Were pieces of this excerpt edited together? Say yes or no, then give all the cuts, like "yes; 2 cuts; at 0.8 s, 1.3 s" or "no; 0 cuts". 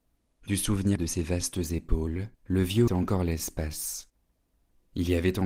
yes; 3 cuts; at 1.0 s, 2.3 s, 2.9 s